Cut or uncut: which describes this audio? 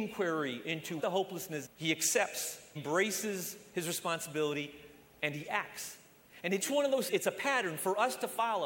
cut